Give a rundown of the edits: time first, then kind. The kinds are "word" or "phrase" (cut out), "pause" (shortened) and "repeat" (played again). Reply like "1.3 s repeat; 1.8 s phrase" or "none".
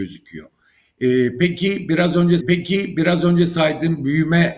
2.4 s repeat